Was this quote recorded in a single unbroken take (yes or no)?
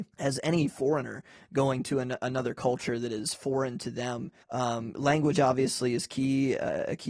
no